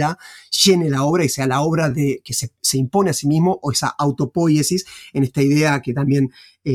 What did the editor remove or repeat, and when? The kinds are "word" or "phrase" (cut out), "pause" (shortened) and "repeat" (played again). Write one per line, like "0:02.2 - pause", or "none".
none